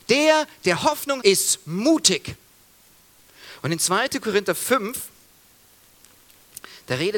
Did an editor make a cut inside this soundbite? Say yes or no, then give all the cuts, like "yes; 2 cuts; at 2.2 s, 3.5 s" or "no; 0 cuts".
yes; 1 cut; at 1.2 s